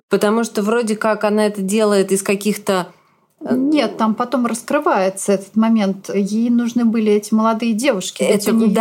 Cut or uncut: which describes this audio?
uncut